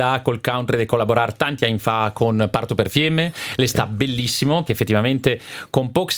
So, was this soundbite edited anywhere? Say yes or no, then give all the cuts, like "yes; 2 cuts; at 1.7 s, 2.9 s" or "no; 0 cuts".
yes; 1 cut; at 4.7 s